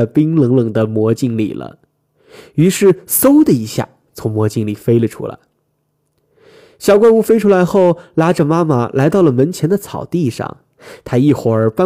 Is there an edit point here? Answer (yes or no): no